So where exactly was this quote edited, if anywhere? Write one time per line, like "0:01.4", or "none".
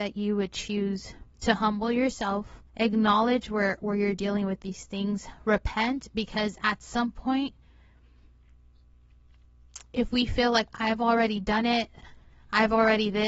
0:01.3
0:02.7
0:10.7